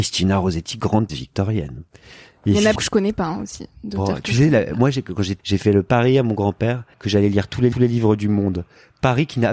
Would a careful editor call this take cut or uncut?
cut